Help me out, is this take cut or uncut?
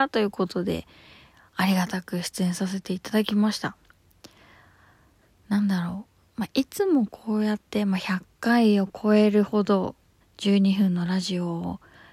cut